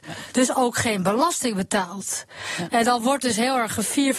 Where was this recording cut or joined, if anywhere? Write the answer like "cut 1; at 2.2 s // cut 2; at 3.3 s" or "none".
none